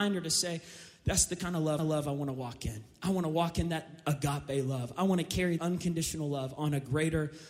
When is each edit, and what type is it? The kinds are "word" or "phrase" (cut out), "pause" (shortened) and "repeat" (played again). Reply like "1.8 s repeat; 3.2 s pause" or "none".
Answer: 1.8 s repeat; 5.6 s word